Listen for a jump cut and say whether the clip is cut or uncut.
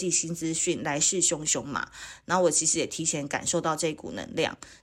uncut